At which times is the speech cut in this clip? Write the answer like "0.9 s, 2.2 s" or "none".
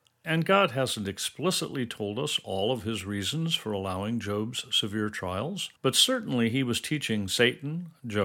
5.8 s